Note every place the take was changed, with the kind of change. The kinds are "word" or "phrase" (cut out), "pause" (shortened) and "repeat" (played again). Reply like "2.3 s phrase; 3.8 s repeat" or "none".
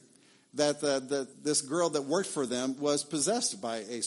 1.3 s pause

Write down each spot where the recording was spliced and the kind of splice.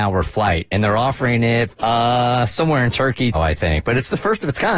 1.7 s word; 3.3 s phrase

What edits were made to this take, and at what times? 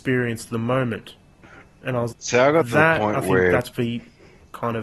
2.1 s word; 3.7 s word

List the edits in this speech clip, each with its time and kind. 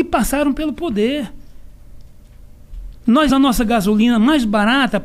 3.3 s word

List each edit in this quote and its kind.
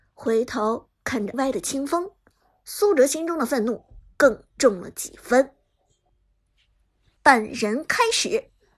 1.3 s word

